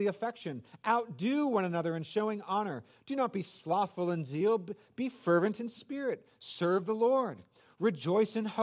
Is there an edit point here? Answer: no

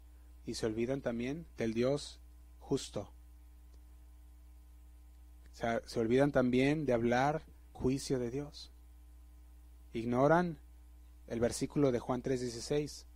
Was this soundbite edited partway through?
yes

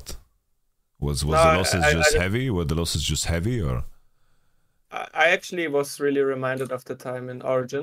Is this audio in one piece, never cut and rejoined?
yes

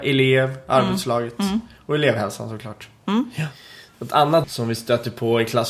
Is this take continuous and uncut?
no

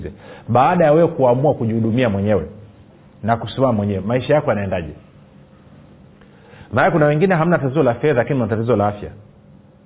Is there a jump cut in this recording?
no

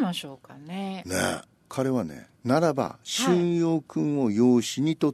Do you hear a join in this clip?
yes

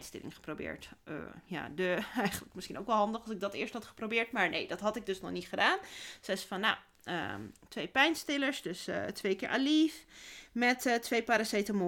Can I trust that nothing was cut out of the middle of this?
yes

